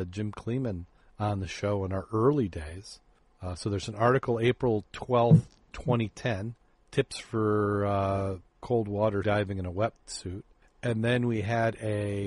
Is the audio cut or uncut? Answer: cut